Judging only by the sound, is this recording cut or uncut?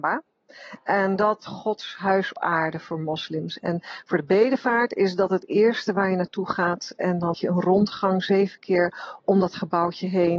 cut